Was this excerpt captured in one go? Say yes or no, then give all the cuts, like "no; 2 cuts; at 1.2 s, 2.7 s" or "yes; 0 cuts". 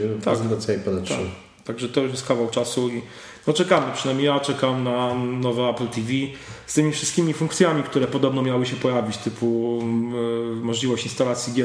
yes; 0 cuts